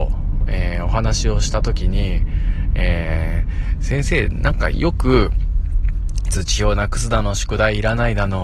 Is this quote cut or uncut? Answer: uncut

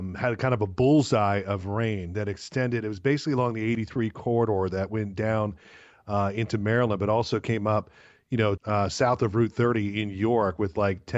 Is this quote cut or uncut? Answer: cut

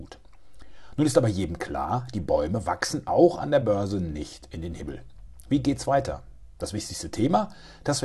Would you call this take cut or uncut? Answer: uncut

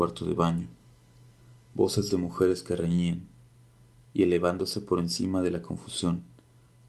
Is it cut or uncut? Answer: uncut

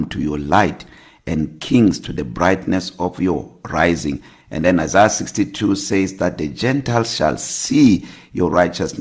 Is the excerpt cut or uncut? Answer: uncut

